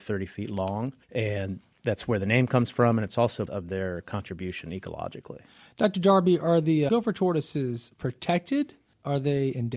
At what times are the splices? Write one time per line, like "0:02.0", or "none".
0:01.0
0:03.5
0:06.9